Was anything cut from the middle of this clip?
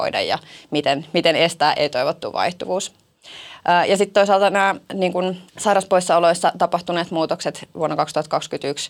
yes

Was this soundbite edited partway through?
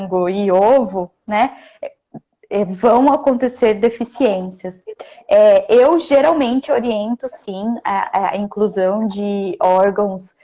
no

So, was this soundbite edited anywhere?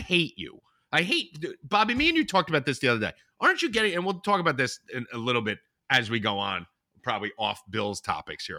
no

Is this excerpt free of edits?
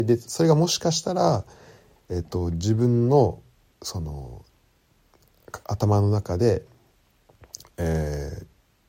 yes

